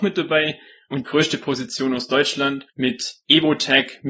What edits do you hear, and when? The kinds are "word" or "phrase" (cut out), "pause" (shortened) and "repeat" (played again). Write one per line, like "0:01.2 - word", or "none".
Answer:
0:01.0 - word
0:02.7 - pause